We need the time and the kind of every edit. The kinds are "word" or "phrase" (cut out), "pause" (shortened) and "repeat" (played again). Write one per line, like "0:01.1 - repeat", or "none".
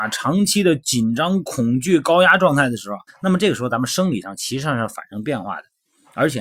0:03.1 - pause